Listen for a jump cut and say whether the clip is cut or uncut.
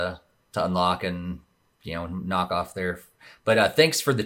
uncut